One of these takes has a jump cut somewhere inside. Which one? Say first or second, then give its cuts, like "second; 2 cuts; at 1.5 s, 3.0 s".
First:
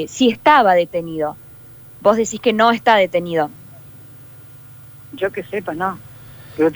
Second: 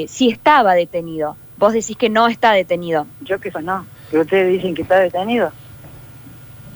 second; 4 cuts; at 1.4 s, 3.1 s, 3.5 s, 3.9 s